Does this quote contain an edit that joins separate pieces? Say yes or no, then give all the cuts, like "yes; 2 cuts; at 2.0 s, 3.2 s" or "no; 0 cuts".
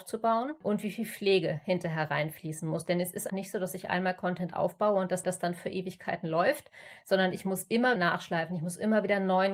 yes; 3 cuts; at 3.3 s, 5.2 s, 8.0 s